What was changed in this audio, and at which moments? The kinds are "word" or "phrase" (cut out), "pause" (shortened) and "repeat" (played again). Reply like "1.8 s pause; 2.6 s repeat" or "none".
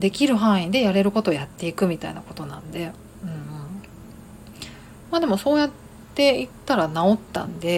5.0 s pause